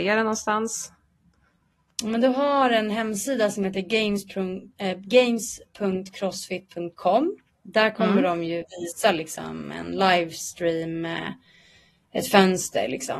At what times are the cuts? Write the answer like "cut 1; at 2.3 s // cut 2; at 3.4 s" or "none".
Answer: none